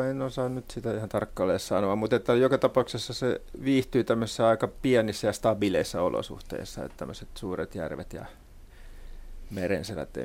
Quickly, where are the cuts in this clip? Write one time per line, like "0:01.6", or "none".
none